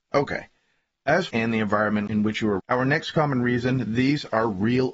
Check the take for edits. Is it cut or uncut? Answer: cut